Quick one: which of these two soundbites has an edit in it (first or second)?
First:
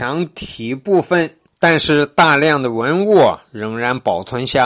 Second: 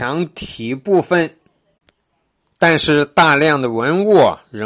first